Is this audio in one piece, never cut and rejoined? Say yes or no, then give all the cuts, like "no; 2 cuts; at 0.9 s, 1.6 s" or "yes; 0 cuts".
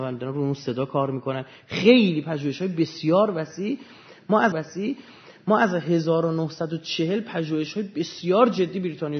no; 1 cut; at 4.5 s